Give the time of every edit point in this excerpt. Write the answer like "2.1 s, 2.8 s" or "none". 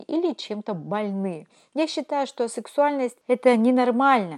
none